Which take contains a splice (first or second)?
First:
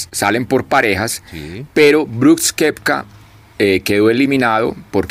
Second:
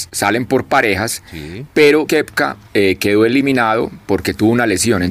second